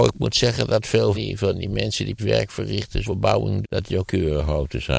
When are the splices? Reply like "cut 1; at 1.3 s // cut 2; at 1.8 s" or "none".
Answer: cut 1; at 1.1 s // cut 2; at 2.2 s // cut 3; at 3.0 s // cut 4; at 3.6 s // cut 5; at 4.1 s